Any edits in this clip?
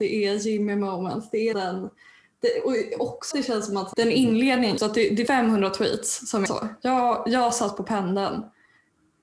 yes; 6 cuts; at 1.5 s, 3.3 s, 3.9 s, 4.8 s, 5.3 s, 6.5 s

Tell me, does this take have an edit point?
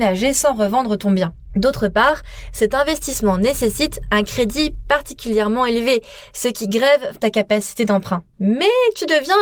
yes; 1 cut; at 7.1 s

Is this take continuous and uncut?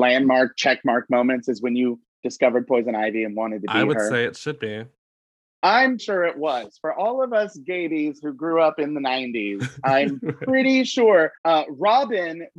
no; 2 cuts; at 6.0 s, 11.4 s

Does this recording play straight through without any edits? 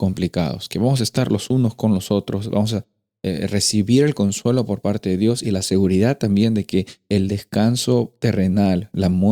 yes; 0 cuts

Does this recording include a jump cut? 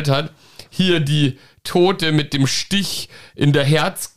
no; 0 cuts

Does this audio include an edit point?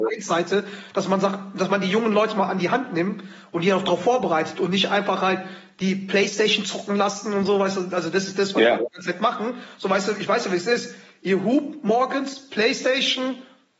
no; 0 cuts

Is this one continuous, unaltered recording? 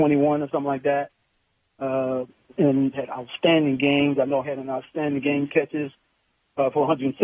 no; 3 cuts; at 2.9 s, 4.4 s, 5.5 s

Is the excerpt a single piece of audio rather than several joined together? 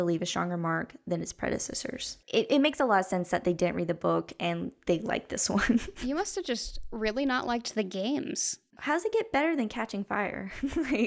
no; 1 cut; at 2.2 s

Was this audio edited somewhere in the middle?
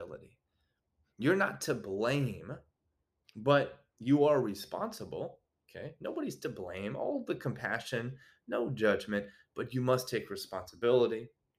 no; 0 cuts

